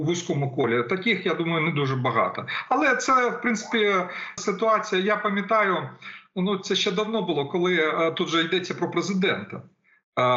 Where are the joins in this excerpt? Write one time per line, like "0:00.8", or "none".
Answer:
0:04.4